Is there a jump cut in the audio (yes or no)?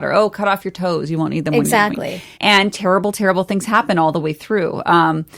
yes